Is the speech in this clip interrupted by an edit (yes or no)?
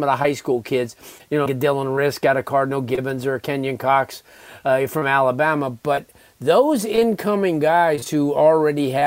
yes